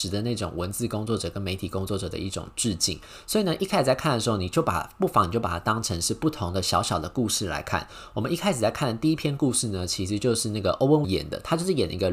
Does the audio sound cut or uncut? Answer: cut